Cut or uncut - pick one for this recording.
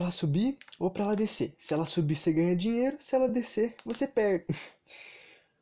uncut